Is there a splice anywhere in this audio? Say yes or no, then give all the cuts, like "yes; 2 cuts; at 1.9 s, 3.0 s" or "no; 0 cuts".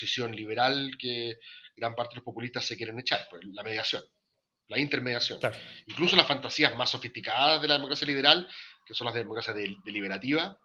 no; 0 cuts